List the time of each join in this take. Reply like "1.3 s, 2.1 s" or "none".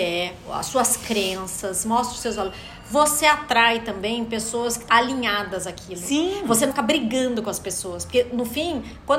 4.9 s, 6.7 s